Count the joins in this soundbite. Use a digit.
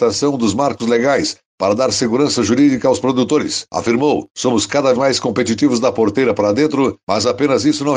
1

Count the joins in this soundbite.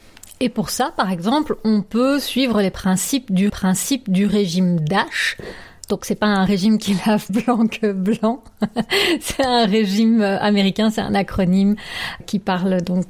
3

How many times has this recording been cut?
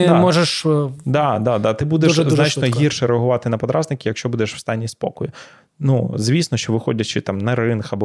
0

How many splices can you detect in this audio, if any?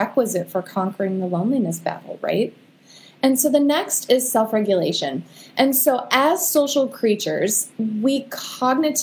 0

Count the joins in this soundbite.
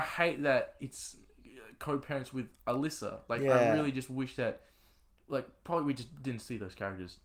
0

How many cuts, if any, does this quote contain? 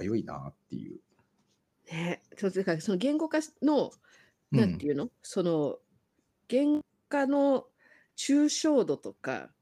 0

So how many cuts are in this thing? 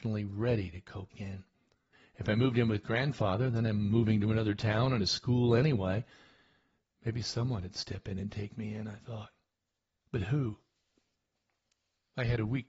2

